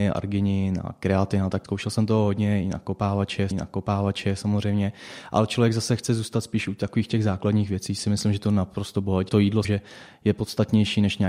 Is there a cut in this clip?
yes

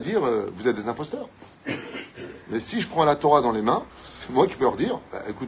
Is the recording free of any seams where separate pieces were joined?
no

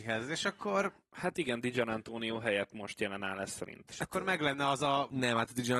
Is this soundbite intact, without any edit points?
yes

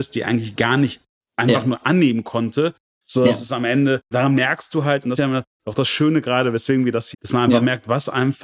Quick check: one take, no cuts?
no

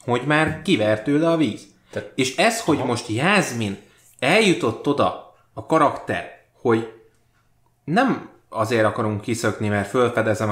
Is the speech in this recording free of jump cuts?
yes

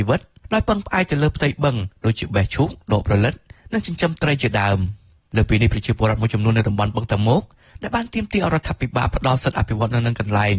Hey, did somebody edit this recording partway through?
no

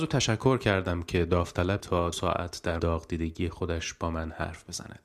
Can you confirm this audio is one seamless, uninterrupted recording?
no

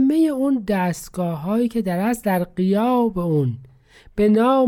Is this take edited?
no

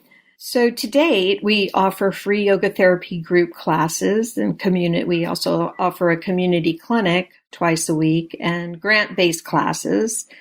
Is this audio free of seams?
yes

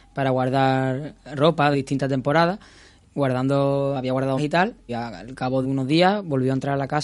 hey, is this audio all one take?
no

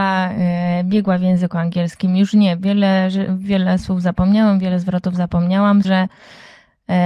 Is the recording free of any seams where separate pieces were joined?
no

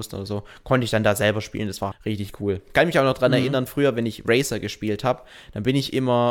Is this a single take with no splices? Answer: no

